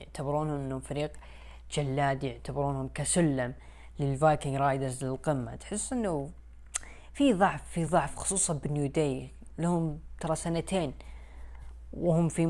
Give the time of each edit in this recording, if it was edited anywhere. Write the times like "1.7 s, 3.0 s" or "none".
none